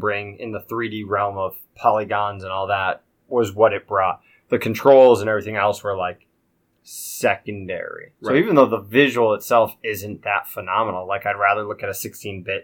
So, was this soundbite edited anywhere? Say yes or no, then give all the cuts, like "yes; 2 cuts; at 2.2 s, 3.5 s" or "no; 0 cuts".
yes; 1 cut; at 8.2 s